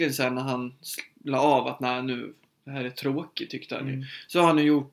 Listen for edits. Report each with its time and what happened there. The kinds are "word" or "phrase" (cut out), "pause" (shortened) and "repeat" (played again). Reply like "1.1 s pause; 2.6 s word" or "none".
none